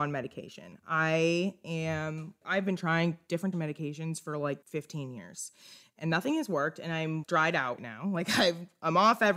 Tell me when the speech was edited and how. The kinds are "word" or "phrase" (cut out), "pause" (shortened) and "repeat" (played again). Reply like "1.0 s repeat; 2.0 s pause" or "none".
2.4 s word; 3.5 s word; 4.6 s pause; 7.2 s word; 7.8 s word